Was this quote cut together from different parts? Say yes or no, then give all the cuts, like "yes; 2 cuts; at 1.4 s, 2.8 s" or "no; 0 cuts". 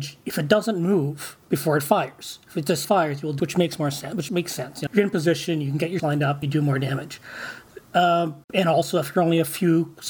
yes; 8 cuts; at 1.4 s, 2.8 s, 3.4 s, 4.3 s, 4.9 s, 6.0 s, 6.4 s, 8.4 s